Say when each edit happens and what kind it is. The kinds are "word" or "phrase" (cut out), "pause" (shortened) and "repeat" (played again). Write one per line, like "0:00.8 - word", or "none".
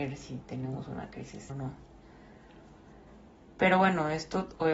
0:01.5 - word